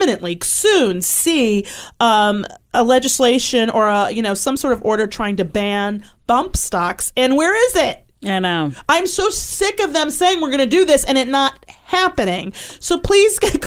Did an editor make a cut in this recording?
no; 0 cuts

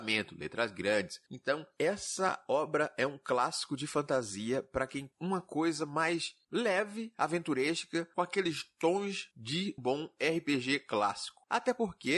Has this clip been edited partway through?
yes; 2 cuts; at 5.1 s, 9.8 s

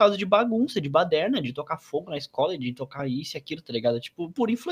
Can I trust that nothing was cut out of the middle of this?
yes; 0 cuts

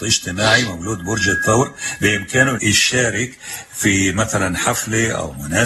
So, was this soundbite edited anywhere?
yes; 1 cut; at 2.6 s

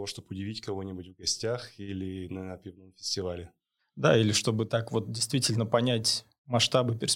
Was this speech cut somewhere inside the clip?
no; 0 cuts

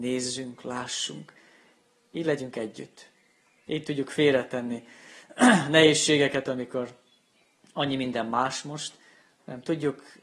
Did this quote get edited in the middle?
no; 0 cuts

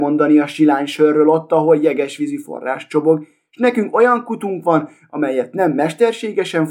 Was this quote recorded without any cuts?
yes; 0 cuts

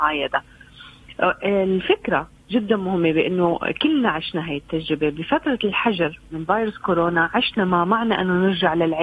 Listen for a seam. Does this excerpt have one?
no; 0 cuts

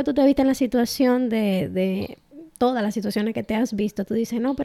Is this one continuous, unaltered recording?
yes; 0 cuts

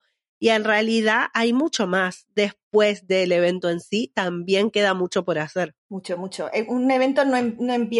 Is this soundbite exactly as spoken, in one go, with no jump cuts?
no; 1 cut; at 5.8 s

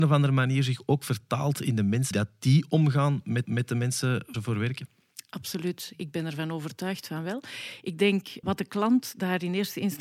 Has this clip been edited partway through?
yes; 4 cuts; at 2.1 s, 3.4 s, 4.3 s, 8.4 s

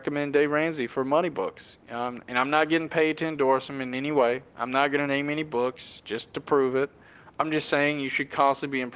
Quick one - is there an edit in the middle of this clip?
no; 0 cuts

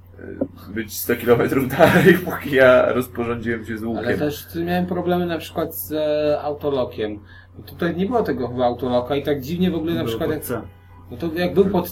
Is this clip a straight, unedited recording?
yes; 0 cuts

